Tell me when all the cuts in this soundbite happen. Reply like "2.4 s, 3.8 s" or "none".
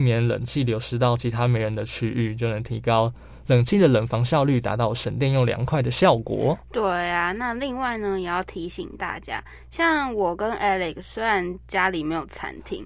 none